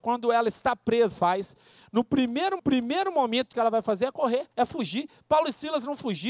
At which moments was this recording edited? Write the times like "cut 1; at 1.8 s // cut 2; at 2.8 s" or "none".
cut 1; at 1.1 s // cut 2; at 2.6 s // cut 3; at 3.5 s // cut 4; at 4.5 s